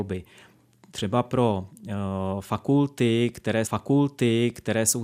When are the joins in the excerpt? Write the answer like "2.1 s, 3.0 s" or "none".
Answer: 3.6 s